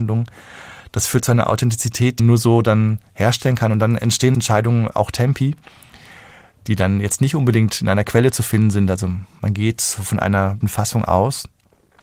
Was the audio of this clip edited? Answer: yes; 3 cuts; at 2.2 s, 4.3 s, 10.6 s

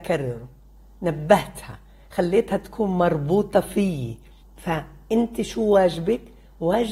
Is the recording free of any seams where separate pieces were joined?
no; 1 cut; at 4.4 s

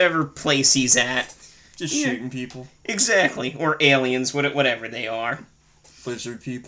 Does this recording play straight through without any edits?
yes; 0 cuts

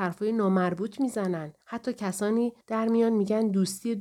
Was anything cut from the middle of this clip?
yes; 2 cuts; at 1.6 s, 2.6 s

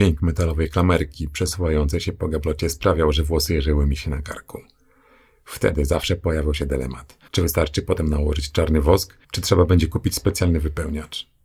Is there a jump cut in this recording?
yes; 2 cuts; at 7.3 s, 9.2 s

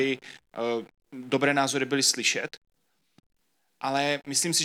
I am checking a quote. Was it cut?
no; 0 cuts

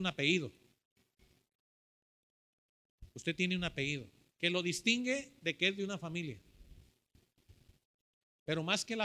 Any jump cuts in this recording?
no; 0 cuts

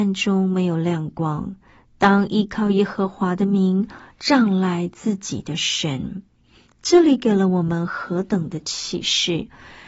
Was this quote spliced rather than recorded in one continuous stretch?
no; 0 cuts

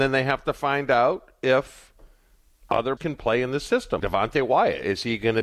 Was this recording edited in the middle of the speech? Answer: yes; 2 cuts; at 3.0 s, 4.0 s

